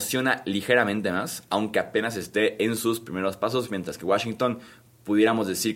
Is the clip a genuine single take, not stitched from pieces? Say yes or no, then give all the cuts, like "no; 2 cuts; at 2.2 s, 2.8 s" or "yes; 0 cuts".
yes; 0 cuts